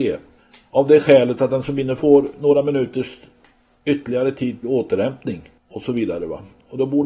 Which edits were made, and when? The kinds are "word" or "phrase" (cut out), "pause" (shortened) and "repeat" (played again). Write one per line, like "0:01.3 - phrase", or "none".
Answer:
0:02.0 - word
0:04.6 - word